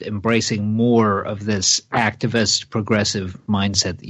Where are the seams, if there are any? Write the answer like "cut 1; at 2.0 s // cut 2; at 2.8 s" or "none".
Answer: none